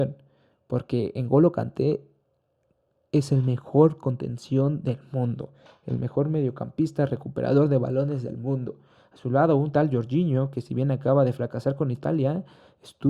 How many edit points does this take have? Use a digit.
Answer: 0